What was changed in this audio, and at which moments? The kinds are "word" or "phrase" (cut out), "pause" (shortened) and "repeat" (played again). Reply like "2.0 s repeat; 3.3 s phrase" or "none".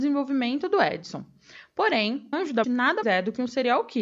2.3 s word; 2.6 s word; 3.0 s word